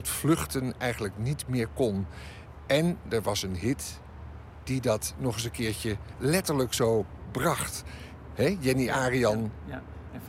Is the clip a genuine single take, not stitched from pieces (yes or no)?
yes